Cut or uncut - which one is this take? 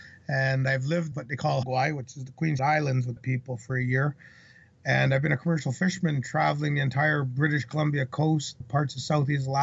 cut